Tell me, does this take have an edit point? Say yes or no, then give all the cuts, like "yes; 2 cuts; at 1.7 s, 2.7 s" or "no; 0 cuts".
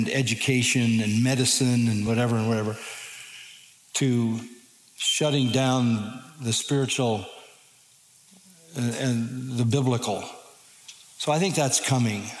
no; 0 cuts